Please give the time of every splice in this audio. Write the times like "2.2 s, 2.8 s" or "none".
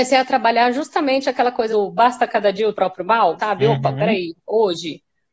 1.7 s, 2.7 s, 3.4 s